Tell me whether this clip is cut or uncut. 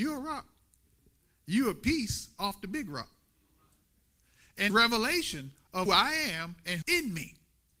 cut